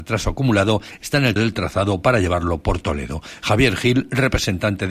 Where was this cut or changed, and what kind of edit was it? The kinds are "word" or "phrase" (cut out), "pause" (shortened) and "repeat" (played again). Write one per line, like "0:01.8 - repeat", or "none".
0:01.4 - word